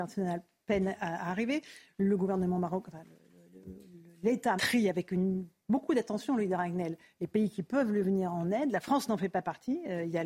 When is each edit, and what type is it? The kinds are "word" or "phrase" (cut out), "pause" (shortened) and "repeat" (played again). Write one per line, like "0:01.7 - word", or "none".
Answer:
0:04.6 - word